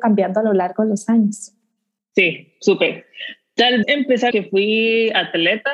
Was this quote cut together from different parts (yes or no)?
yes